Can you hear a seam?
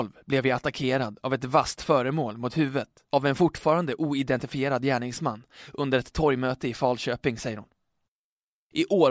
no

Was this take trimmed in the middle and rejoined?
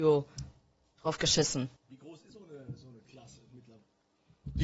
yes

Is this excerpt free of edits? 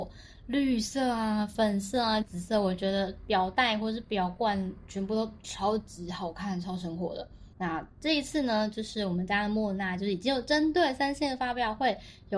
no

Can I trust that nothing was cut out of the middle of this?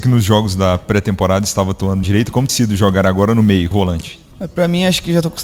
no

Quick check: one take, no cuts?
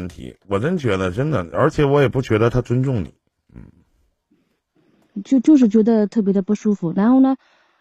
yes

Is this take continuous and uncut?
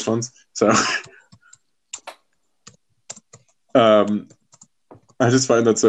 yes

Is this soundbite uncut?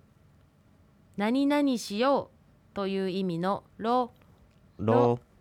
no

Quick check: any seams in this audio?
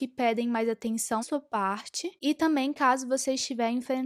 yes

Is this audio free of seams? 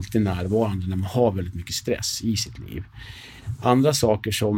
yes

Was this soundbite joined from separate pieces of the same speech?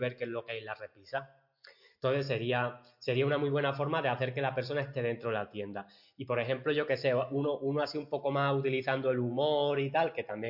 no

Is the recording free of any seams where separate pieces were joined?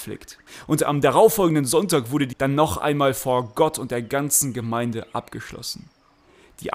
no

